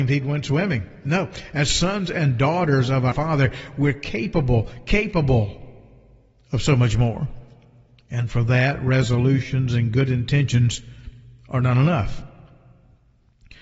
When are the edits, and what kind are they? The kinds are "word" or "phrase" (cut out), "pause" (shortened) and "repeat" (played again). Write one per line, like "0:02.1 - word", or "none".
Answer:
0:03.1 - word